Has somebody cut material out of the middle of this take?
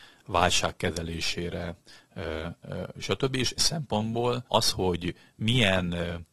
yes; 2 cuts; at 3.6 s, 4.5 s

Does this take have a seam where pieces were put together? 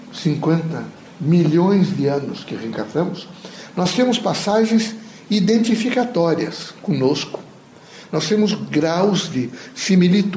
no; 0 cuts

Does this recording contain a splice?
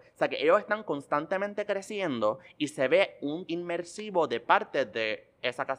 yes; 1 cut; at 3.5 s

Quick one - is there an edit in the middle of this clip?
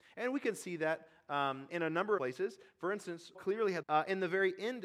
yes; 4 cuts; at 1.7 s, 2.2 s, 3.3 s, 3.8 s

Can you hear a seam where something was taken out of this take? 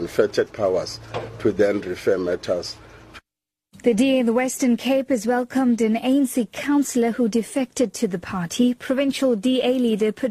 no; 0 cuts

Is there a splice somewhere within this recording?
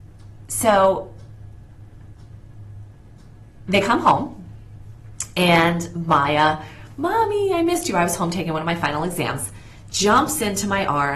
no; 0 cuts

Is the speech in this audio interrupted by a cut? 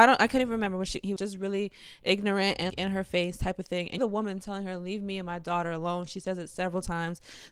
yes; 3 cuts; at 1.2 s, 2.7 s, 4.0 s

